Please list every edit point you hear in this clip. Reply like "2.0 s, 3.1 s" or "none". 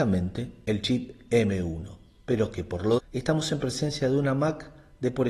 3.0 s